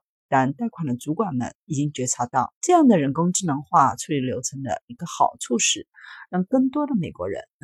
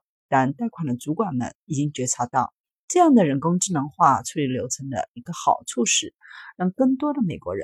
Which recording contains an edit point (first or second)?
first